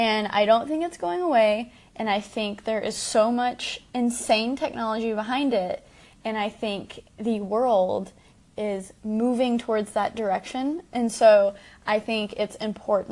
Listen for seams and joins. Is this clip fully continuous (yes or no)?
yes